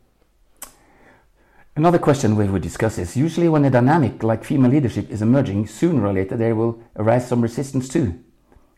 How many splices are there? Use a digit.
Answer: 1